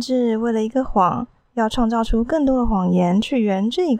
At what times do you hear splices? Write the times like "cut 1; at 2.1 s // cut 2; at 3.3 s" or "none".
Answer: cut 1; at 1.4 s